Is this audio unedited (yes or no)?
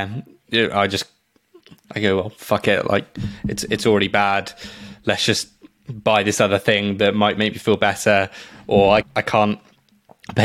yes